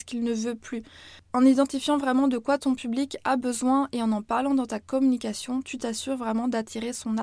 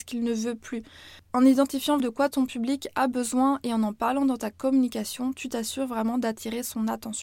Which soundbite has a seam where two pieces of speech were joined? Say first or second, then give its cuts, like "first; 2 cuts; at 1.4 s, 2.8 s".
second; 1 cut; at 2.0 s